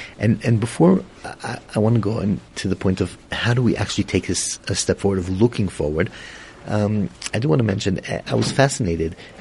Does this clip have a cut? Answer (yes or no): yes